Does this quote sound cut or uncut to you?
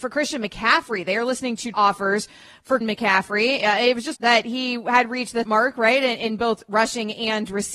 cut